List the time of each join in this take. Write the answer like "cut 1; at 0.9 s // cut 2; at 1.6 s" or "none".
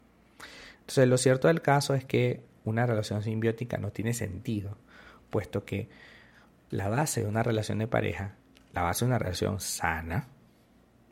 none